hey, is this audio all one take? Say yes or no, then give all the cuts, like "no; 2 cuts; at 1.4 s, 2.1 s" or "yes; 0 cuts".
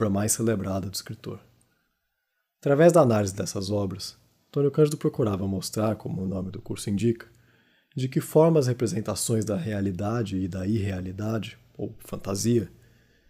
yes; 0 cuts